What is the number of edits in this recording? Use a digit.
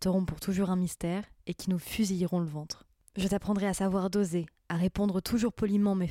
0